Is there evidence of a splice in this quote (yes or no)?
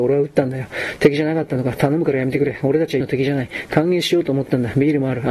yes